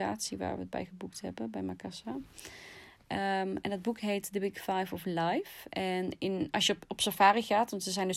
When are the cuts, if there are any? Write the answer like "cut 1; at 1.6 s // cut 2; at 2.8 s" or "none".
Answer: none